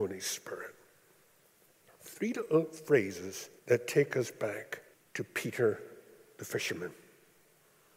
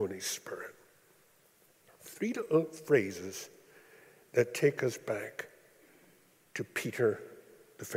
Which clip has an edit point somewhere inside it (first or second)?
first